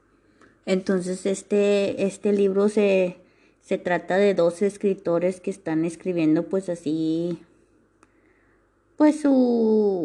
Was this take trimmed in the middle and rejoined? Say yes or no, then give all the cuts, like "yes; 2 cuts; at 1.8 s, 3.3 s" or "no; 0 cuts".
no; 0 cuts